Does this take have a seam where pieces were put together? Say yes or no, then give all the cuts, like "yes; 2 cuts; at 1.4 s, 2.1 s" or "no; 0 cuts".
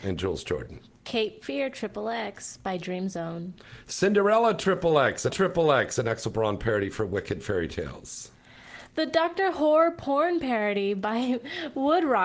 yes; 1 cut; at 5.3 s